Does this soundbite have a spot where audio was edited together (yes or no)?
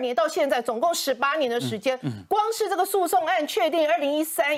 no